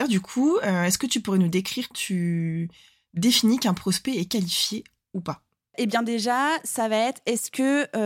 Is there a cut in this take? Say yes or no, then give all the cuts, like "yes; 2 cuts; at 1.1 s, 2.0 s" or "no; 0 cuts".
yes; 1 cut; at 1.9 s